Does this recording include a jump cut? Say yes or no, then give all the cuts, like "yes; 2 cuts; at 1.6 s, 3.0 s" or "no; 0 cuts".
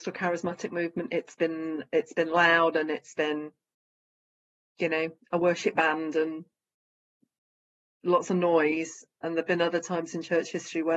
no; 0 cuts